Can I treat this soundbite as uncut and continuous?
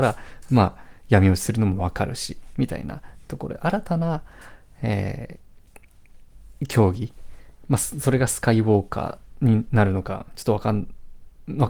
yes; 0 cuts

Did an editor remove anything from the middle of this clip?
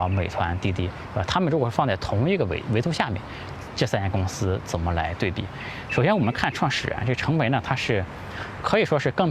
no; 0 cuts

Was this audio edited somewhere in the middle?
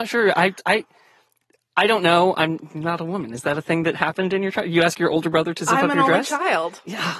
no; 0 cuts

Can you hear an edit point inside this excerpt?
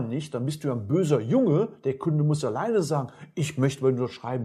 no; 0 cuts

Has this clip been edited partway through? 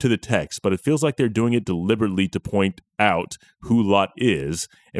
no; 0 cuts

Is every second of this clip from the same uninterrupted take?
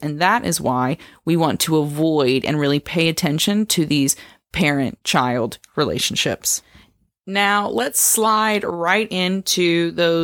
yes; 0 cuts

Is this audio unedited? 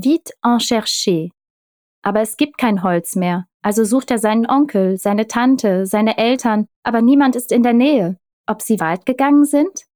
no; 4 cuts; at 3.5 s, 6.7 s, 8.3 s, 8.8 s

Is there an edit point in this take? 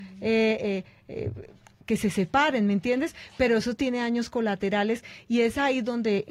no; 0 cuts

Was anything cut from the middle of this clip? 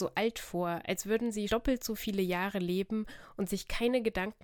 yes; 1 cut; at 1.5 s

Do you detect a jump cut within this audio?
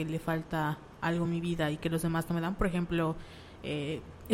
no; 0 cuts

